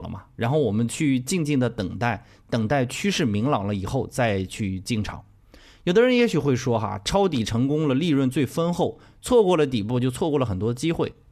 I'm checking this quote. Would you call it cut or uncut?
uncut